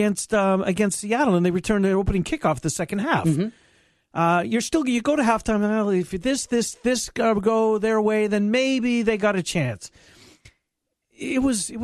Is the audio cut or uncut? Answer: uncut